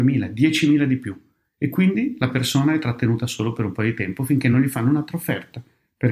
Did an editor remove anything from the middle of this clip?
no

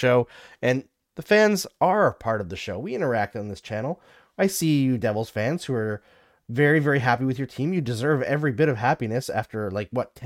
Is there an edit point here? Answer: no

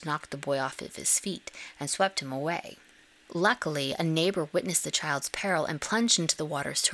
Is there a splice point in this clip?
no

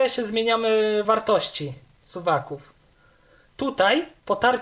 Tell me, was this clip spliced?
no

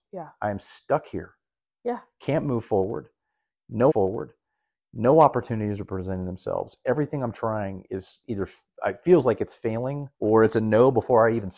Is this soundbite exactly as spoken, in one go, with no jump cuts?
no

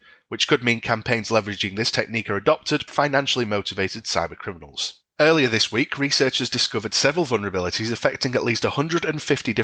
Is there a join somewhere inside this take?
yes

